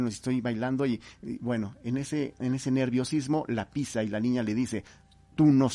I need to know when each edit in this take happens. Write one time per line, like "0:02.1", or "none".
none